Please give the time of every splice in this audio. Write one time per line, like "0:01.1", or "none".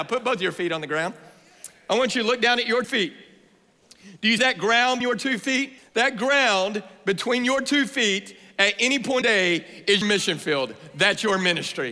0:02.8
0:04.4
0:05.0
0:05.8
0:09.2
0:10.0

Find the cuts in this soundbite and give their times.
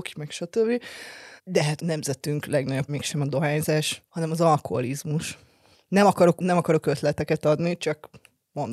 0:01.4
0:01.8
0:02.9
0:04.1
0:05.7
0:06.4

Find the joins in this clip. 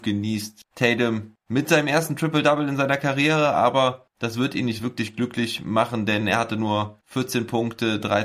none

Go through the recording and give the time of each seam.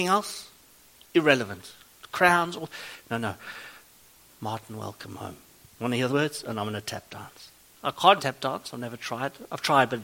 0:06.1
0:08.2

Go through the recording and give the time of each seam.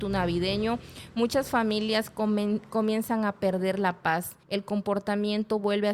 0:04.4

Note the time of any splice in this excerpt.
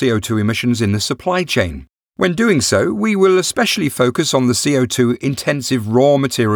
none

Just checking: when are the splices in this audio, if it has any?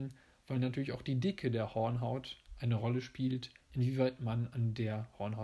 0:03.6

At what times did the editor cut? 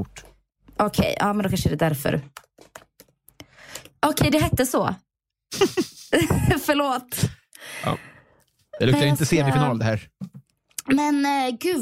none

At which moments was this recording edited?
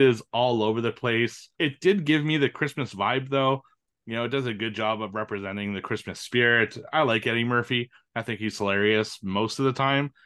0:01.5

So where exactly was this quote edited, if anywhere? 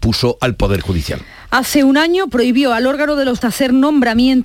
0:03.4

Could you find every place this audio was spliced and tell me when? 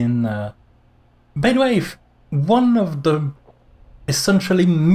none

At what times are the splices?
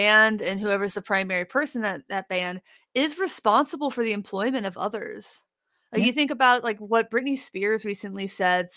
none

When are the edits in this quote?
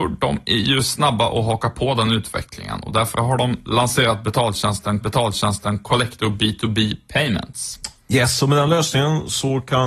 0:05.0

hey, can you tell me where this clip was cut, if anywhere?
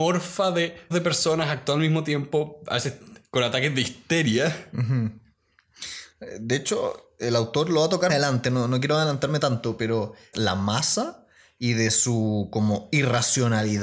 0:00.9
0:08.1
0:10.3

